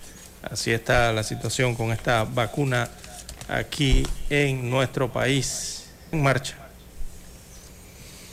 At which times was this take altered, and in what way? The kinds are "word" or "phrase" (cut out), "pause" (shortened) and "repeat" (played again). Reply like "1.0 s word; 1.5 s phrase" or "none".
6.1 s word